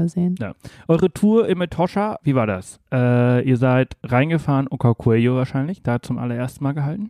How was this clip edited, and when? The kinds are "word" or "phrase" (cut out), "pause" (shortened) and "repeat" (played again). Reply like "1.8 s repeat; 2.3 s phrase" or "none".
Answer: 2.2 s word